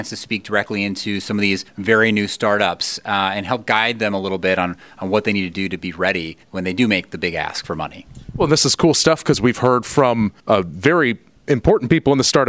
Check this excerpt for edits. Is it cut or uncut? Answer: cut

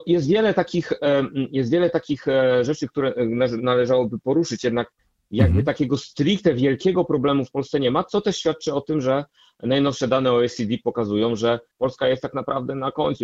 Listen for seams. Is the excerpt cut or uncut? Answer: uncut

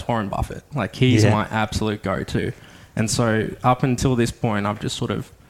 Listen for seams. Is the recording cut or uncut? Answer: uncut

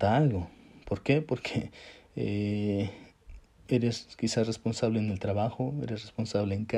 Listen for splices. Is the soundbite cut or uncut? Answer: uncut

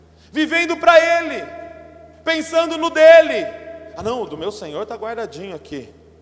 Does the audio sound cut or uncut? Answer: uncut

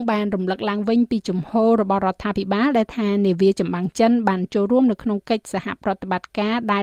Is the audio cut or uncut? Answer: uncut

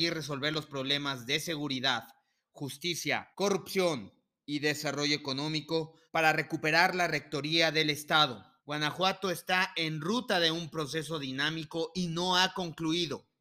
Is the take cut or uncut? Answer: cut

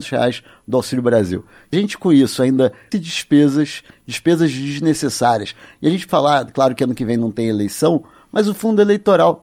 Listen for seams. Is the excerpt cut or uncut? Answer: cut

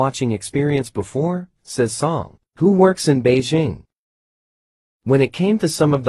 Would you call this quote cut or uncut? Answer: uncut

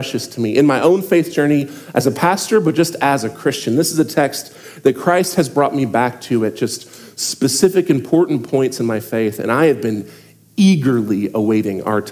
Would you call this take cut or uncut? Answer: uncut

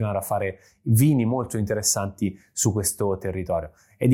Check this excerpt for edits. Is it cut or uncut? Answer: uncut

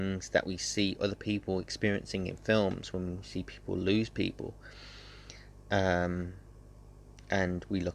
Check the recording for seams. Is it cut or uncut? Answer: uncut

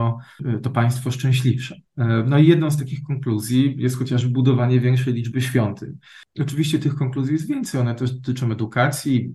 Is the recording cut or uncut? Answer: uncut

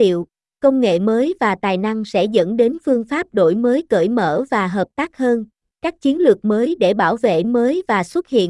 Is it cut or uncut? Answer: cut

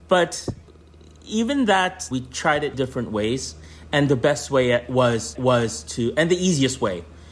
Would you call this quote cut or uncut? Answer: cut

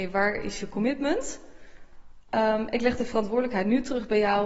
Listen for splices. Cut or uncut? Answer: uncut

